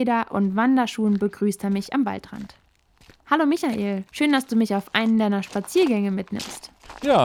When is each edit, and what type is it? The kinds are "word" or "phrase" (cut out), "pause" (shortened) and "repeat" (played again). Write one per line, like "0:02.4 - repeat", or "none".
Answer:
0:04.1 - pause